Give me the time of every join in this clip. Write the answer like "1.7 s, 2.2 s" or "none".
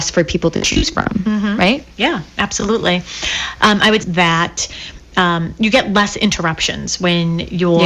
4.0 s